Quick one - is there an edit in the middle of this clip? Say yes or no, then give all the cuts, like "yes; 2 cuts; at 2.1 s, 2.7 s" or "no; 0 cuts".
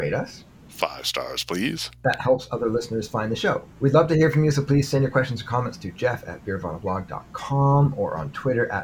yes; 1 cut; at 3.7 s